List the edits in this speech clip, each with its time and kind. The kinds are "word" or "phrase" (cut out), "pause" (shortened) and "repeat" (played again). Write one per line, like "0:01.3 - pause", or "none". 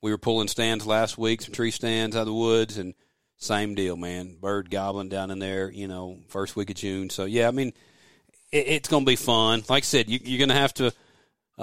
none